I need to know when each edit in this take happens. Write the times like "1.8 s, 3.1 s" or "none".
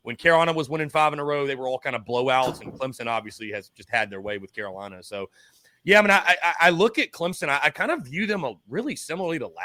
none